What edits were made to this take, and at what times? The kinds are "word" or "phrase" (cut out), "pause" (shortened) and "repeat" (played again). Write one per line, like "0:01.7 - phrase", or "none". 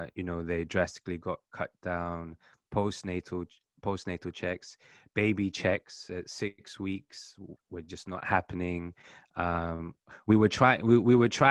none